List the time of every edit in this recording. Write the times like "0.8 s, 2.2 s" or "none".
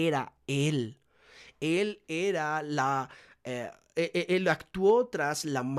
none